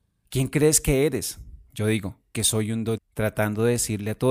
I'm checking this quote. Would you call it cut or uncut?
cut